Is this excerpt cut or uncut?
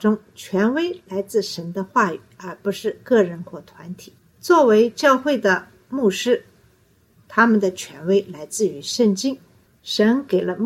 uncut